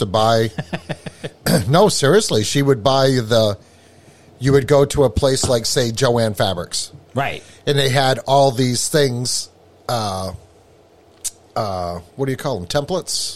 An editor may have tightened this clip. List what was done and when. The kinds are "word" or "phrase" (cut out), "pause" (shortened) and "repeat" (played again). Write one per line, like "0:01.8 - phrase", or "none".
none